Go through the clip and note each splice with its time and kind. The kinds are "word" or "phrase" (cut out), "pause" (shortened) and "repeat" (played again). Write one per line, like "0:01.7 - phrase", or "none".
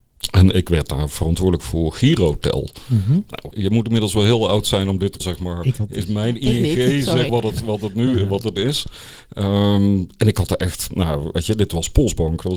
0:03.5 - word
0:05.2 - phrase
0:05.7 - word
0:07.3 - word
0:08.6 - word